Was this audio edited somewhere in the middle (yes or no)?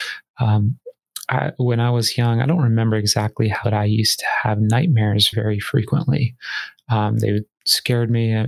yes